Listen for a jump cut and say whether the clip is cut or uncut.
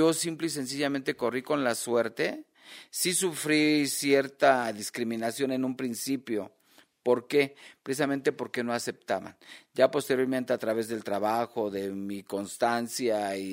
uncut